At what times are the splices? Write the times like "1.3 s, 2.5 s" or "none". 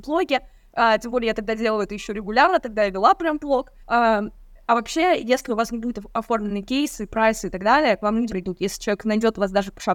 3.8 s, 8.3 s